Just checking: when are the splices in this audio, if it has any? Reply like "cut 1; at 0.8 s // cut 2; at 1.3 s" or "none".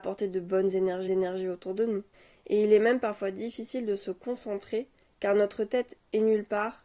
cut 1; at 1.1 s